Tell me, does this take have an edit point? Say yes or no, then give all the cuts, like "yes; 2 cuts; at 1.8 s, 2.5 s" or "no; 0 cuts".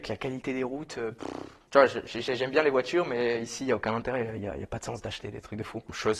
no; 0 cuts